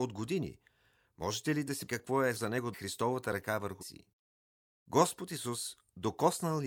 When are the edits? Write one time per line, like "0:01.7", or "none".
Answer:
0:01.9
0:02.4
0:02.7
0:03.8